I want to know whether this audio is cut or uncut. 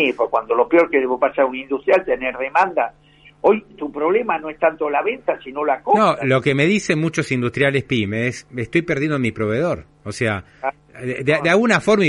uncut